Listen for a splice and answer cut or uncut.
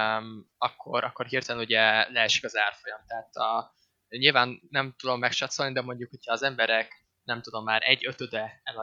uncut